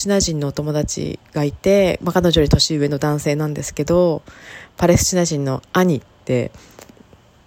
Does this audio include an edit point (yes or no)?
yes